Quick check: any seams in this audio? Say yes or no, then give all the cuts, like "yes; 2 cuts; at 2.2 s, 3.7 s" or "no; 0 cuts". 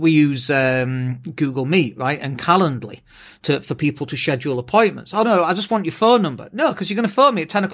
no; 0 cuts